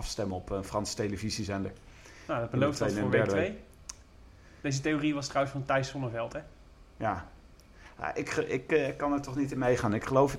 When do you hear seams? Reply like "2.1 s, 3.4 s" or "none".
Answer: none